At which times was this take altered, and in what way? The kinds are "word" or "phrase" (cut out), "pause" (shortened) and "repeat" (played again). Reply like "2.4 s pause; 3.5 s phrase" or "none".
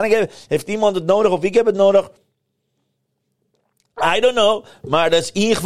none